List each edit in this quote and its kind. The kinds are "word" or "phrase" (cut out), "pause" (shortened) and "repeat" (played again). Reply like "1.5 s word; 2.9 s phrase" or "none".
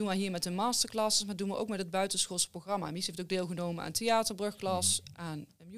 none